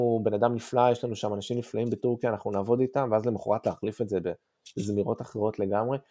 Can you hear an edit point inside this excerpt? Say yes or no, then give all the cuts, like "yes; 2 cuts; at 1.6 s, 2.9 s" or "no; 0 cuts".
no; 0 cuts